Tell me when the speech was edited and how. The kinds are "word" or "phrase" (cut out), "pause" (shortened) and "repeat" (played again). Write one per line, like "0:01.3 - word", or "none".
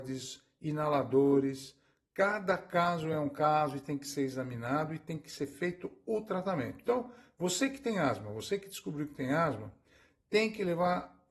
none